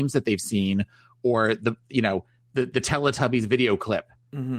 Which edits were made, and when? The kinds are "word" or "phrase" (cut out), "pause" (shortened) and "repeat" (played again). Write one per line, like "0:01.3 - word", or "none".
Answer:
none